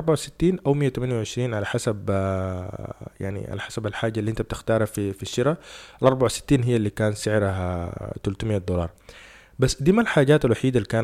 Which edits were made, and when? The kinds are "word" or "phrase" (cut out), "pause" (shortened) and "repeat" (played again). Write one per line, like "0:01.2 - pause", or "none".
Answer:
none